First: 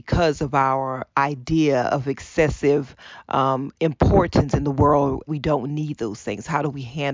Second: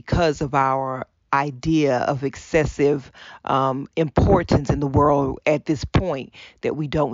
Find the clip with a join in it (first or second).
first